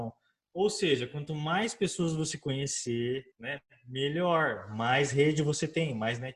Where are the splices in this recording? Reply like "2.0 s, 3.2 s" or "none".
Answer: 3.3 s